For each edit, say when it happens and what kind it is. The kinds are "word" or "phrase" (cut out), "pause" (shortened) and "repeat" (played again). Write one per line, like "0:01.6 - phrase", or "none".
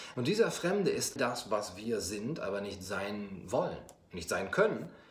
0:01.2 - word